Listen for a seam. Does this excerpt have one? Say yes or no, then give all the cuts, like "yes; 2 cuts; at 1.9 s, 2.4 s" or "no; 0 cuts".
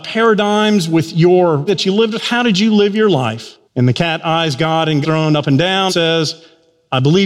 yes; 4 cuts; at 1.7 s, 3.6 s, 5.0 s, 5.9 s